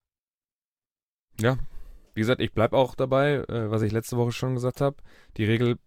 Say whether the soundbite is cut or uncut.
cut